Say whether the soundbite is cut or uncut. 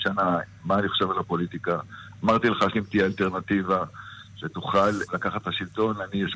cut